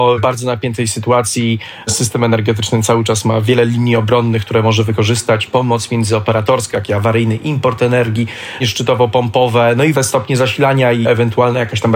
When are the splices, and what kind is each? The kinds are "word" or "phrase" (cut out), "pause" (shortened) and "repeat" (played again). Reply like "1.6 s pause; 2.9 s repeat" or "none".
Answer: 6.7 s word; 8.6 s word; 9.9 s word